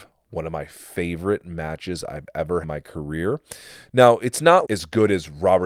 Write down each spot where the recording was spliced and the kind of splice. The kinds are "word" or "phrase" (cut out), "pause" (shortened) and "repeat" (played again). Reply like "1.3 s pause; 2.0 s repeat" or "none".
2.6 s phrase; 4.6 s word